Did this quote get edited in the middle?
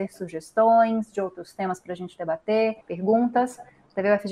yes; 1 cut; at 2.8 s

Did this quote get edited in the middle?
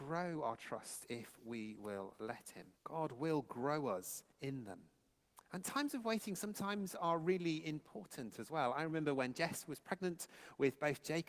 yes; 3 cuts; at 2.8 s, 4.3 s, 5.5 s

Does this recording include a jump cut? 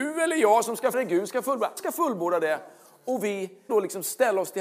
yes; 3 cuts; at 0.9 s, 1.8 s, 3.7 s

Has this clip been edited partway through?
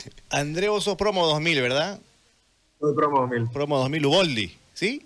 no; 0 cuts

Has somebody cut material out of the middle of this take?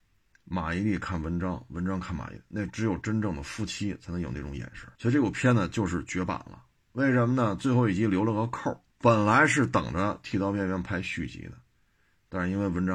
yes; 2 cuts; at 4.9 s, 8.9 s

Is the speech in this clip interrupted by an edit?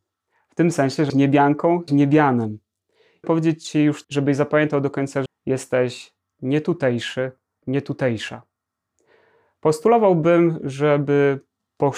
yes; 6 cuts; at 1.1 s, 1.9 s, 3.2 s, 4.0 s, 5.3 s, 7.6 s

